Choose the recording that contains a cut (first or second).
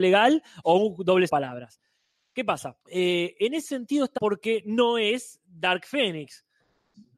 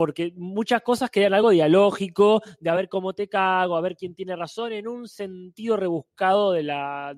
first